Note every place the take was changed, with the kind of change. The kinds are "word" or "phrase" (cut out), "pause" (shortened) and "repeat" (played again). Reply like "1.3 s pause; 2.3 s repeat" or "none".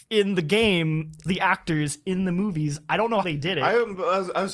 1.3 s word; 3.2 s word